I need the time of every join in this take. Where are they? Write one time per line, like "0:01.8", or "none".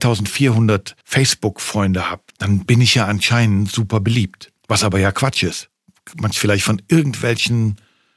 0:01.0
0:02.3
0:04.6
0:06.3